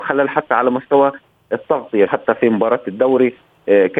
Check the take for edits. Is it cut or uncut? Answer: cut